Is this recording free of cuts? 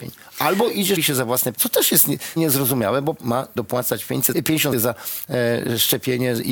no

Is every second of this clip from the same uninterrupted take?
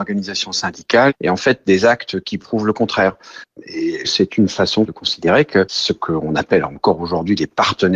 yes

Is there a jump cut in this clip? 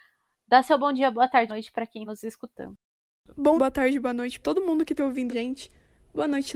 yes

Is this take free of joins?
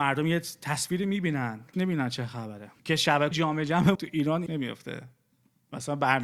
no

